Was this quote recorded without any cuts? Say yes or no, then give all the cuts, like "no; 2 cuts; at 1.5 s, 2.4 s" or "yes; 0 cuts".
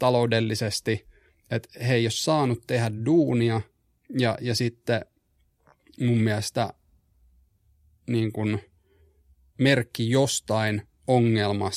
yes; 0 cuts